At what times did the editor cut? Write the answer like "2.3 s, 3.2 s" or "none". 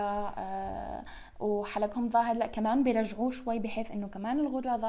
none